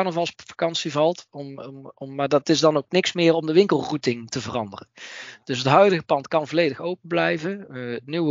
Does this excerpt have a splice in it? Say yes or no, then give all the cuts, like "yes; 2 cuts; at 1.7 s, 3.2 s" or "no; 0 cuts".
no; 0 cuts